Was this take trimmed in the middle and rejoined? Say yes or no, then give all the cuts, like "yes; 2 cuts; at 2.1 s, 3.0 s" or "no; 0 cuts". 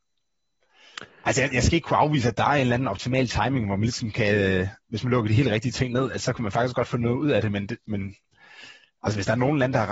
no; 0 cuts